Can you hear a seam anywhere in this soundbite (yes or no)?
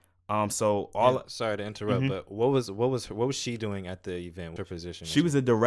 yes